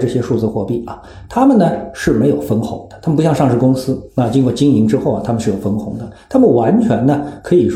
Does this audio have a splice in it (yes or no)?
no